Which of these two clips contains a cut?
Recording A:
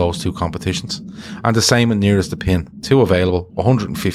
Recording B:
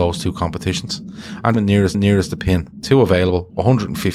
B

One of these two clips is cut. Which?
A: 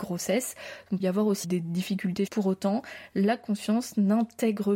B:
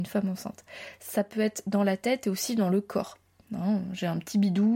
A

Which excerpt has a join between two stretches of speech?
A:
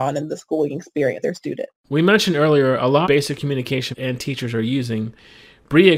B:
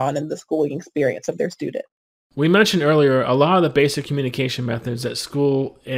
A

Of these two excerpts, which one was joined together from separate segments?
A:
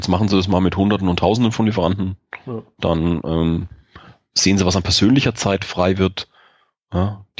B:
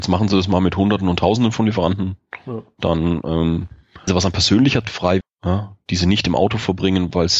B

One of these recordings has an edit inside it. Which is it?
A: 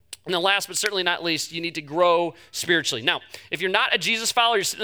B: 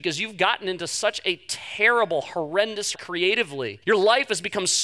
B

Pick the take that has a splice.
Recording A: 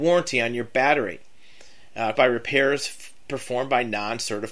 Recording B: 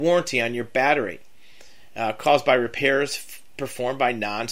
A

